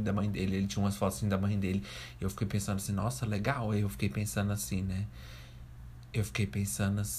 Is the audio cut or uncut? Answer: uncut